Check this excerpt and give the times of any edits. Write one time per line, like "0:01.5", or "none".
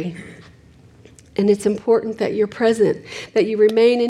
none